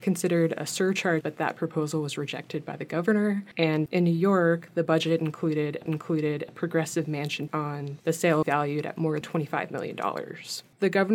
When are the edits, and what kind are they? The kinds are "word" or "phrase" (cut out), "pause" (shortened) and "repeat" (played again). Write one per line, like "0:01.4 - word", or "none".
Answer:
0:01.2 - phrase
0:05.9 - repeat
0:07.5 - word
0:08.4 - phrase
0:09.2 - word